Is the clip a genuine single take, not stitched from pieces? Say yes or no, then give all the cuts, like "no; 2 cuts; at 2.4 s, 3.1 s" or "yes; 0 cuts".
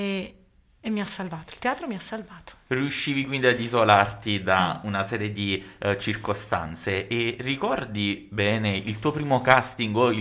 yes; 0 cuts